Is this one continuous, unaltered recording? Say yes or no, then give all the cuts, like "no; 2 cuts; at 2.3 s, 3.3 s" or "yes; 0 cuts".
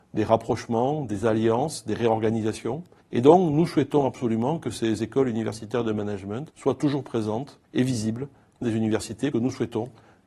no; 5 cuts; at 3.0 s, 6.5 s, 7.6 s, 8.6 s, 9.3 s